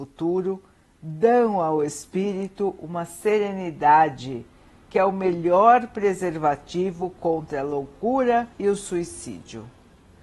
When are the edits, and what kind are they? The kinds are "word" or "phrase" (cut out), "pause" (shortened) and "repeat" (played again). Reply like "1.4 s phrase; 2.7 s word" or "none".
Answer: 8.5 s pause